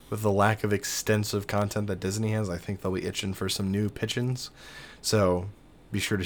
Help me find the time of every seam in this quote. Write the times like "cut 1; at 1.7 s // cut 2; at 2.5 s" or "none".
none